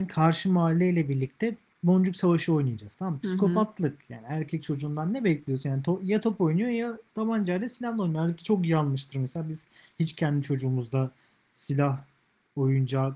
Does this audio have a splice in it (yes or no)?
no